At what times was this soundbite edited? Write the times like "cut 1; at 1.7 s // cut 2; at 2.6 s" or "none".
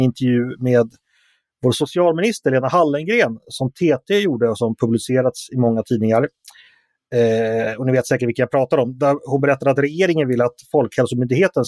none